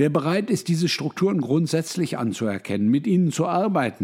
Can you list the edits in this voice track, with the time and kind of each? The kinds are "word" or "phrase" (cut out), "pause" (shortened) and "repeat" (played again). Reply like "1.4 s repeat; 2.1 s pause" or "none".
none